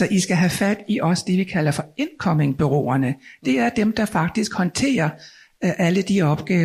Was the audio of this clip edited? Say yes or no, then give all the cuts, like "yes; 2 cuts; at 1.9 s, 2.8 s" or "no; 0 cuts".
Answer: no; 0 cuts